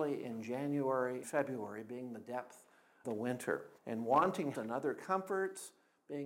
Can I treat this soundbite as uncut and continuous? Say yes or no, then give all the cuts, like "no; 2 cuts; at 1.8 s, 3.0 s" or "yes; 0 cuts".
no; 4 cuts; at 1.2 s, 3.0 s, 3.8 s, 4.5 s